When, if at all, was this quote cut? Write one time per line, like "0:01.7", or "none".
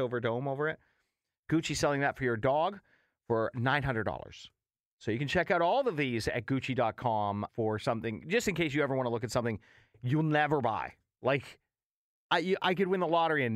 0:07.5